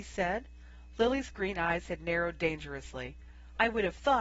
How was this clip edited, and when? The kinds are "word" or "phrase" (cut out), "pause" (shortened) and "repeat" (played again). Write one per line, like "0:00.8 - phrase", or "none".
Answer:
none